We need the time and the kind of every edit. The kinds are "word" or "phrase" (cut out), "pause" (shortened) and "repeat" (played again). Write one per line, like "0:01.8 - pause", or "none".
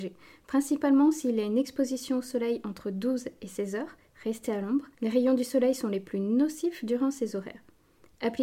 0:04.9 - pause